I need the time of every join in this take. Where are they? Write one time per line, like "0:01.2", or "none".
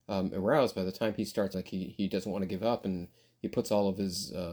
0:01.5